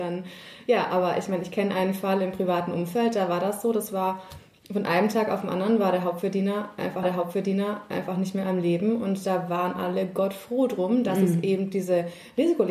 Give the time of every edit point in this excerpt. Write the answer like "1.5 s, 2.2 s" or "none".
7.0 s